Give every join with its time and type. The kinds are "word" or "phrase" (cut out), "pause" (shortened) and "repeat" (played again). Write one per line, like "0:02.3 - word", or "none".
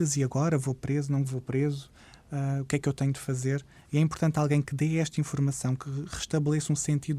none